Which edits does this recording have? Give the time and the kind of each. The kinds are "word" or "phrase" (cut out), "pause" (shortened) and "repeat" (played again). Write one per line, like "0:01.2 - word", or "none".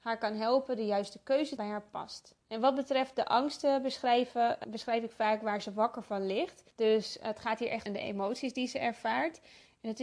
0:01.6 - phrase
0:02.4 - pause
0:04.6 - word
0:06.7 - pause
0:07.9 - phrase